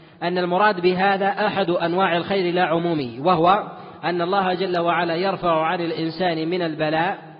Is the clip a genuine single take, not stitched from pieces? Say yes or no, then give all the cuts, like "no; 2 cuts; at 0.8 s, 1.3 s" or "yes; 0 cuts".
yes; 0 cuts